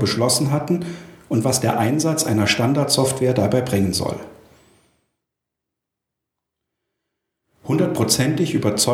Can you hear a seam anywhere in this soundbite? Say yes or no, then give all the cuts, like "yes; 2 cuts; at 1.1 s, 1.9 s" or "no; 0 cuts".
no; 0 cuts